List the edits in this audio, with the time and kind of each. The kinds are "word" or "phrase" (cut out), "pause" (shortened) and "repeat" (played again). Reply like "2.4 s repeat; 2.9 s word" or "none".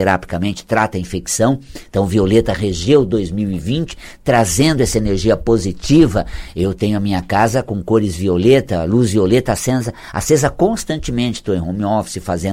none